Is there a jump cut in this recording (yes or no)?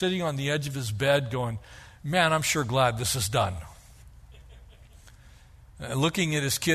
no